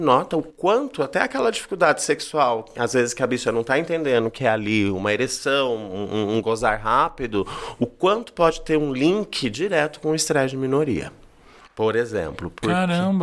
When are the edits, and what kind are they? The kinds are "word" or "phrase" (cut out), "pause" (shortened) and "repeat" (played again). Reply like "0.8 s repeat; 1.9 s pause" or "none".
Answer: none